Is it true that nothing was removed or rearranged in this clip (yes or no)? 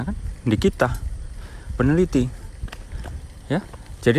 no